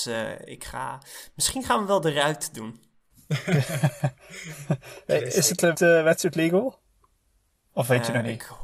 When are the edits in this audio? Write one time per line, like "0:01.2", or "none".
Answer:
0:05.7